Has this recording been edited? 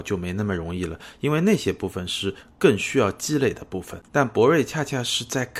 yes; 1 cut; at 4.1 s

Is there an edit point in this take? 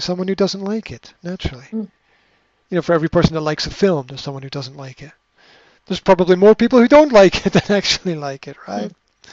no; 0 cuts

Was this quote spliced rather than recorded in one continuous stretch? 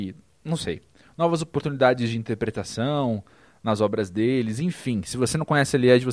no; 0 cuts

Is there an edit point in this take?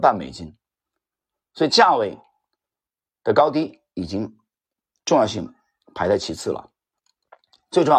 no; 0 cuts

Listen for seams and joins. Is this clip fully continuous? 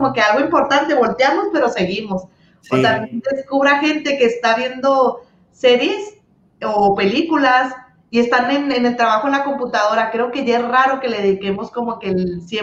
yes; 0 cuts

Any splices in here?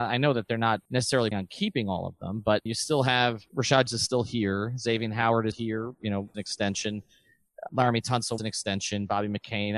yes; 7 cuts; at 1.3 s, 2.7 s, 3.9 s, 5.5 s, 6.3 s, 7.7 s, 8.4 s

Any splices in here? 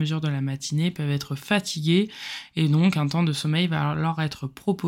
no; 0 cuts

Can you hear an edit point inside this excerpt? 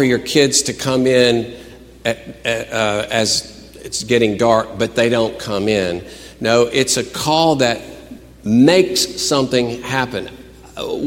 no; 0 cuts

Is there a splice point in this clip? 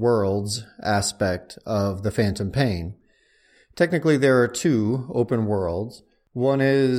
no; 0 cuts

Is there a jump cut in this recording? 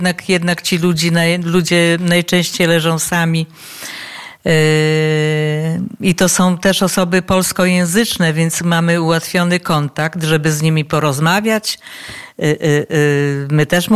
no; 0 cuts

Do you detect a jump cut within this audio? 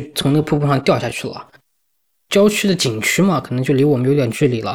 no; 0 cuts

